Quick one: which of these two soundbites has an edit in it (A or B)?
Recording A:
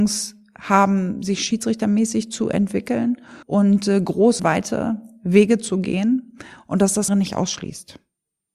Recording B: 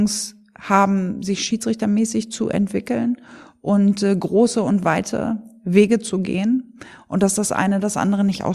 A